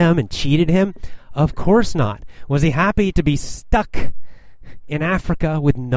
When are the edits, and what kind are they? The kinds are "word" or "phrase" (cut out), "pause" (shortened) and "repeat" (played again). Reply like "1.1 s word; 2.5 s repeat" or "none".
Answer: none